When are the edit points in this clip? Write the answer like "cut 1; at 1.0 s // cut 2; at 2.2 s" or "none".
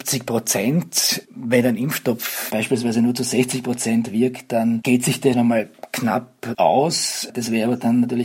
cut 1; at 2.5 s // cut 2; at 5.3 s // cut 3; at 6.5 s

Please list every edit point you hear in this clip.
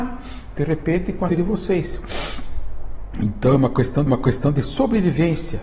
cut 1; at 1.3 s // cut 2; at 4.1 s

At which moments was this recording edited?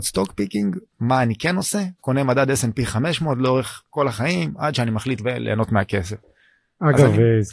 cut 1; at 2.0 s // cut 2; at 3.9 s // cut 3; at 5.2 s

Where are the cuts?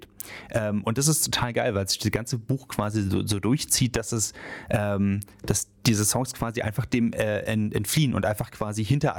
cut 1; at 5.8 s

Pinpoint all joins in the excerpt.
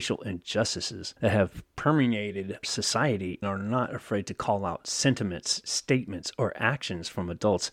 cut 1; at 1.2 s // cut 2; at 2.6 s // cut 3; at 3.4 s

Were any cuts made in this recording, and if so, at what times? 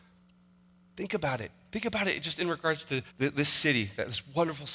cut 1; at 3.1 s

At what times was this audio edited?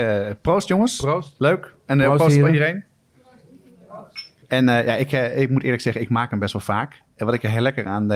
cut 1; at 4.4 s

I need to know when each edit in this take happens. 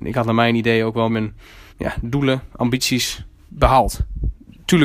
cut 1; at 1.1 s // cut 2; at 1.7 s // cut 3; at 3.5 s

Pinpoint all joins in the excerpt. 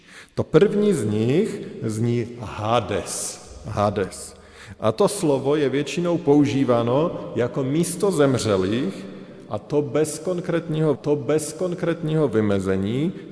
cut 1; at 10.9 s

